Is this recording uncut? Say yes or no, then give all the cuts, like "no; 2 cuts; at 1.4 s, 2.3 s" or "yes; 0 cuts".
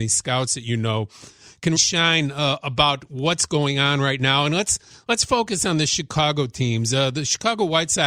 no; 1 cut; at 1.8 s